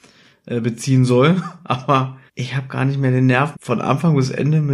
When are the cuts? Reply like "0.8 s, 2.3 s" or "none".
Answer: 2.3 s, 3.5 s